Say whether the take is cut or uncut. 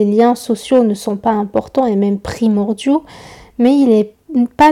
uncut